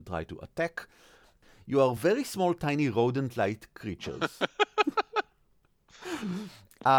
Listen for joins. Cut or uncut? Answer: uncut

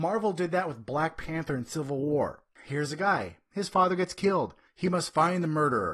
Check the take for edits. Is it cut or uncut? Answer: uncut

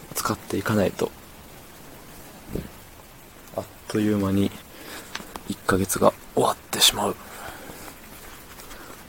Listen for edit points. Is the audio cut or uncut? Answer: uncut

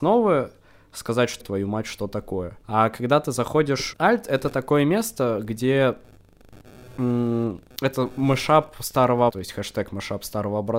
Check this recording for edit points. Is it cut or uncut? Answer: cut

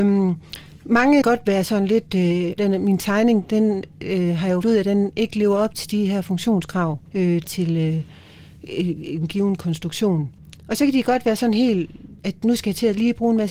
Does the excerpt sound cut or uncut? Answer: cut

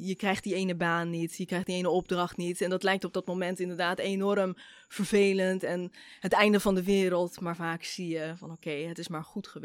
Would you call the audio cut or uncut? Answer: uncut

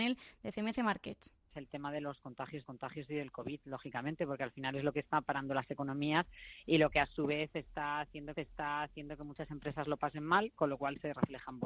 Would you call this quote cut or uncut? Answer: cut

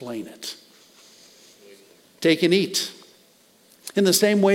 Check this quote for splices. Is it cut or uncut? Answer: cut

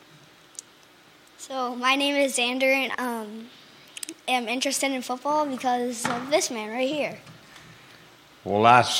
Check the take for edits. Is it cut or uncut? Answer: cut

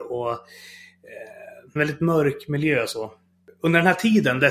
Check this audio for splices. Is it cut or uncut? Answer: cut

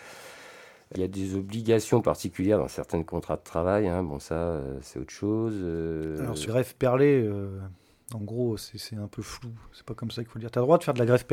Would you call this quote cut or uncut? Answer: cut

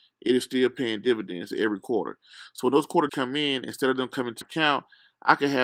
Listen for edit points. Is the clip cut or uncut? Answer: cut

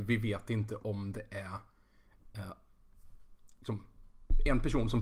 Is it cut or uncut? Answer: uncut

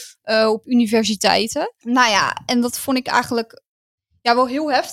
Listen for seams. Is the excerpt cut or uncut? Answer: uncut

